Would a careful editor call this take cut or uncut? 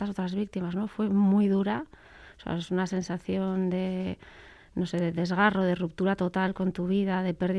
uncut